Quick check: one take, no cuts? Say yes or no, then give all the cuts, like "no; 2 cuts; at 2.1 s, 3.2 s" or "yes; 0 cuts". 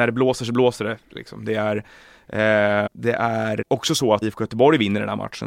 no; 3 cuts; at 2.9 s, 3.6 s, 4.2 s